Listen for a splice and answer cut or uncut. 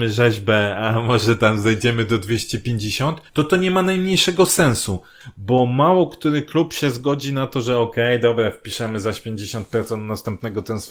cut